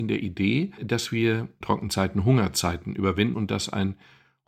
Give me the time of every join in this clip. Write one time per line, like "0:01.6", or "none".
0:01.6
0:03.3